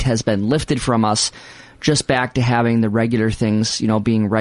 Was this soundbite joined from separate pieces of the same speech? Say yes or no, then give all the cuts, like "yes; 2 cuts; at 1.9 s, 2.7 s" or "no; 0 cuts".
no; 0 cuts